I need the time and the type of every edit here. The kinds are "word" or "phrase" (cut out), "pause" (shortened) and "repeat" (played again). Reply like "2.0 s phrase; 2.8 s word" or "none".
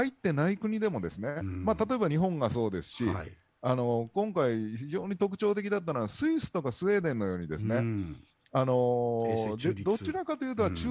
none